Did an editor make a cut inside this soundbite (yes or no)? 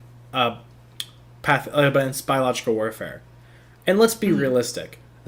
no